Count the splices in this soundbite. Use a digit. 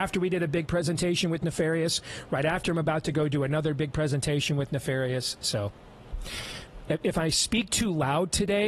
0